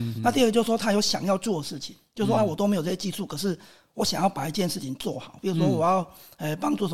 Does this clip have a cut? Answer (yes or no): no